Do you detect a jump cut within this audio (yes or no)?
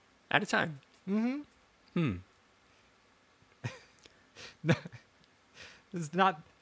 no